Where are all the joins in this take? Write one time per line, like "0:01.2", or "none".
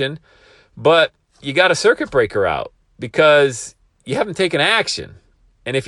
none